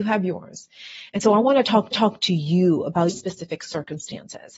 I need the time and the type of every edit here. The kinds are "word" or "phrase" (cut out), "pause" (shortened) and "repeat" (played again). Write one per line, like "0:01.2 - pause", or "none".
0:01.9 - repeat
0:03.1 - word